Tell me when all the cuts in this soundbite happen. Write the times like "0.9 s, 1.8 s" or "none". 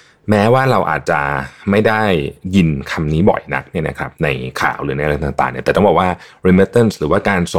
none